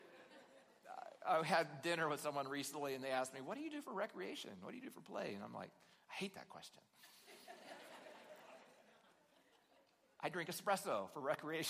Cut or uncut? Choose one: uncut